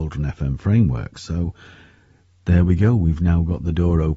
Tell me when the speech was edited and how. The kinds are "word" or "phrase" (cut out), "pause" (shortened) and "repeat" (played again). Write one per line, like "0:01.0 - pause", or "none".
none